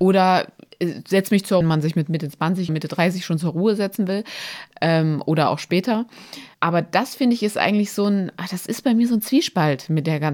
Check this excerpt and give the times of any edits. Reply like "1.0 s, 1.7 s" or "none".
1.6 s, 2.7 s, 6.5 s